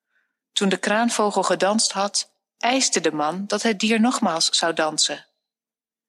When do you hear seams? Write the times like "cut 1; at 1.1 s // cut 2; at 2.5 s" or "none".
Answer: none